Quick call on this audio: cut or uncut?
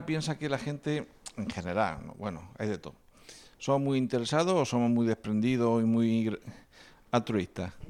uncut